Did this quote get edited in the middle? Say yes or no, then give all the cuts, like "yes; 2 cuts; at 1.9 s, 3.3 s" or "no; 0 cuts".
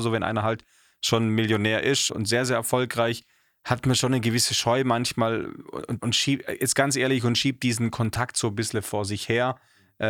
yes; 2 cuts; at 2.1 s, 6.0 s